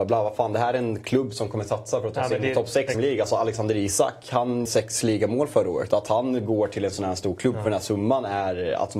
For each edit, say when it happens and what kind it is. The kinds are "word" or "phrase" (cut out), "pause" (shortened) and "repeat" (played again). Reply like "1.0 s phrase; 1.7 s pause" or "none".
2.9 s word; 4.7 s word